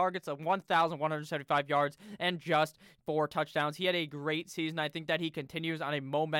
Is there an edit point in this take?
no; 0 cuts

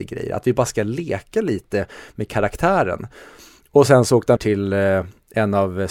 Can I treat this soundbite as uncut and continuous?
no; 1 cut; at 4.4 s

